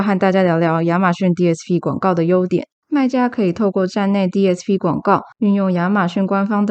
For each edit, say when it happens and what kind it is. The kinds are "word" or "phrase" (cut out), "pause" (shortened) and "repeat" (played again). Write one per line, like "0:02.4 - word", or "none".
0:05.3 - pause